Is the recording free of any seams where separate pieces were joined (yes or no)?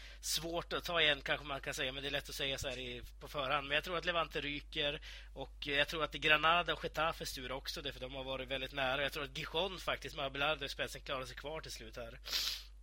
yes